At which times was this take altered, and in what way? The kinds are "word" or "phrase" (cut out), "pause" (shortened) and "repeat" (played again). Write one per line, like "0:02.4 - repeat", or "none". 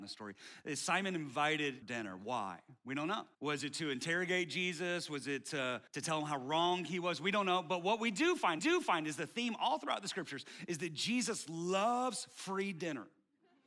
0:01.8 - phrase
0:03.3 - pause
0:05.9 - pause
0:08.6 - repeat